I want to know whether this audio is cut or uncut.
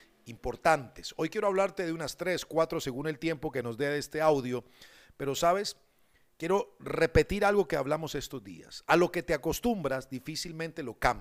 uncut